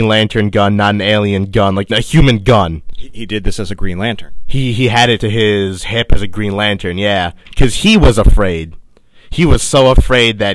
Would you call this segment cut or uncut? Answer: cut